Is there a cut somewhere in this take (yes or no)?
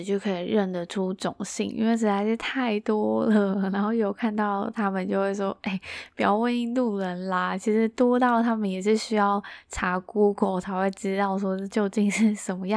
no